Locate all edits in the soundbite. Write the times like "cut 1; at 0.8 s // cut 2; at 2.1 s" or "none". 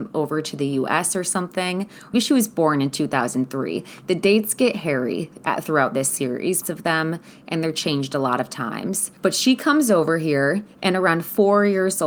cut 1; at 2.1 s // cut 2; at 6.6 s // cut 3; at 9.2 s